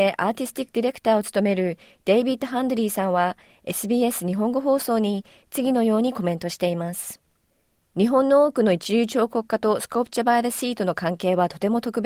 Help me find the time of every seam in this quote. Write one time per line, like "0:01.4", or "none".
none